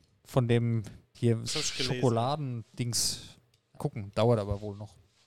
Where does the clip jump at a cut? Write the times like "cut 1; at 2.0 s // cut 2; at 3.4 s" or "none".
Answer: cut 1; at 1.1 s // cut 2; at 1.5 s // cut 3; at 3.8 s